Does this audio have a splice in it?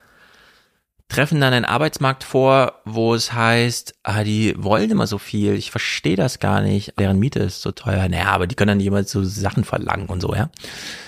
yes; 1 cut; at 7.0 s

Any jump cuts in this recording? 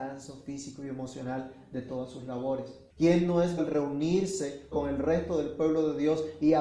yes; 3 cuts; at 2.9 s, 3.6 s, 4.7 s

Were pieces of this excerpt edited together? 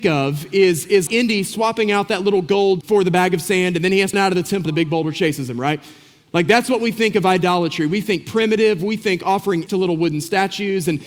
yes; 5 cuts; at 1.1 s, 2.8 s, 4.1 s, 4.7 s, 9.7 s

